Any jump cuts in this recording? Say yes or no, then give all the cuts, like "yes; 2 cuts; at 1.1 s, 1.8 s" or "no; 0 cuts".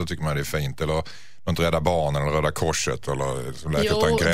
no; 0 cuts